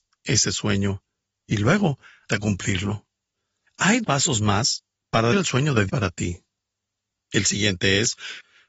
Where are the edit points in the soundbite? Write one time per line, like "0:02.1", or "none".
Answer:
0:02.3
0:04.0
0:05.3
0:05.9